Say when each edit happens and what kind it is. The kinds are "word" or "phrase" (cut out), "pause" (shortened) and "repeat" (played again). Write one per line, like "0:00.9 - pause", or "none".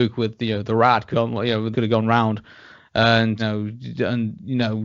0:01.1 - word
0:01.7 - phrase
0:03.4 - word